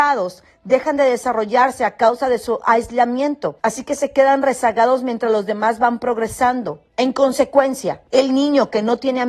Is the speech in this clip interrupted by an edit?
yes; 3 cuts; at 3.6 s, 6.9 s, 8.1 s

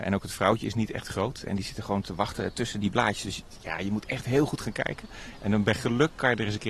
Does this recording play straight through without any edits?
yes; 0 cuts

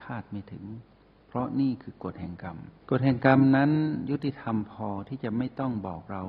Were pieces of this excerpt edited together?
yes; 1 cut; at 2.8 s

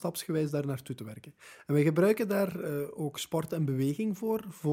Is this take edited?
no; 0 cuts

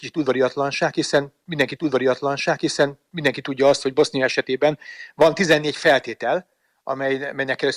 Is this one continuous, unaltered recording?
no; 1 cut; at 1.8 s

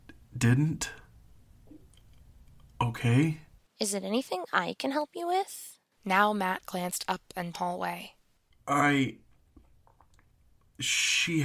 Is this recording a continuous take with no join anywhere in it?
no; 1 cut; at 7.5 s

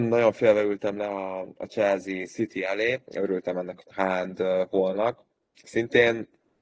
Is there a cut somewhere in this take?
yes; 2 cuts; at 3.1 s, 3.8 s

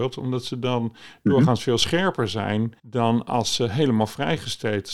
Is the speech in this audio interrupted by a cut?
yes; 1 cut; at 2.8 s

